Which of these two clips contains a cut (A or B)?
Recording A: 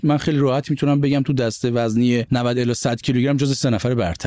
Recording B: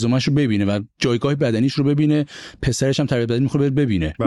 B